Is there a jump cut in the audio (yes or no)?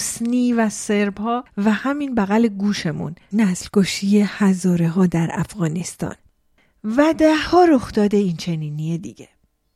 no